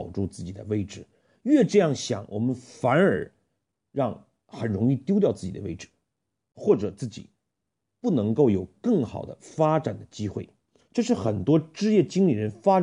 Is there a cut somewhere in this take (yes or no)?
no